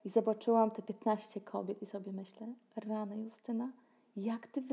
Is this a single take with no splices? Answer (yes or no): yes